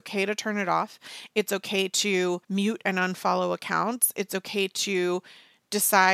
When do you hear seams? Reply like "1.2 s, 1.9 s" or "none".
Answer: 2.4 s